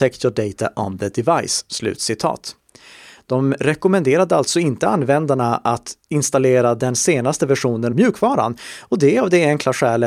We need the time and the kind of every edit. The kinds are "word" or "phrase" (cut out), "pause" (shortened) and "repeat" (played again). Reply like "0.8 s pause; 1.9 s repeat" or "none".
7.9 s word